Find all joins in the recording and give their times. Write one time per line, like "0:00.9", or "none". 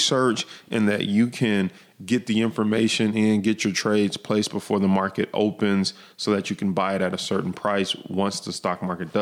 none

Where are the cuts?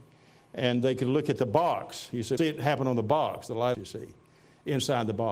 0:02.4
0:03.7

